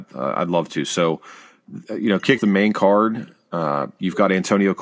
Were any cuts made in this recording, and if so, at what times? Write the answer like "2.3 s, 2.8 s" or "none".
2.4 s